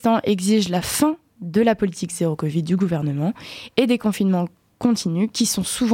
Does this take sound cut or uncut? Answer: uncut